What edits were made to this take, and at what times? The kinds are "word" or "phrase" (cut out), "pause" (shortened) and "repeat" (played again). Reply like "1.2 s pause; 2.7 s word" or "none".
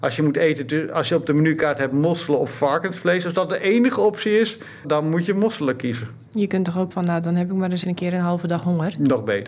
4.8 s word; 6.3 s pause; 6.9 s word; 7.8 s word